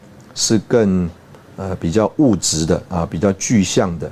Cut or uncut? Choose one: uncut